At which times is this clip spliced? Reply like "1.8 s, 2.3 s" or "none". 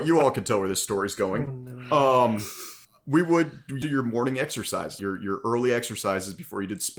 2.8 s, 3.8 s, 5.0 s